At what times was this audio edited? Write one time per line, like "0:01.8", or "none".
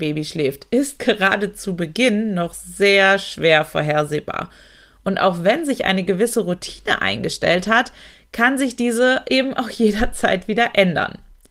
none